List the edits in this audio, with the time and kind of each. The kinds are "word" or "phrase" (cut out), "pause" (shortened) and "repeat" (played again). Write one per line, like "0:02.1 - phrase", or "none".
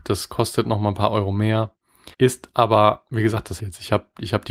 0:02.1 - pause
0:03.6 - word